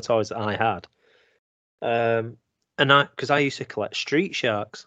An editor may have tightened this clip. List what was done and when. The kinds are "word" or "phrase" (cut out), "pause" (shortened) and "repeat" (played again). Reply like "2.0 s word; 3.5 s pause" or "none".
none